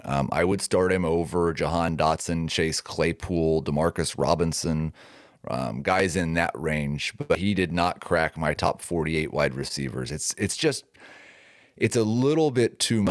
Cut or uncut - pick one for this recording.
uncut